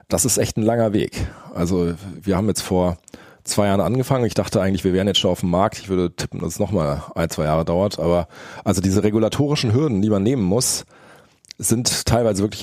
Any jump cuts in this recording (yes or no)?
no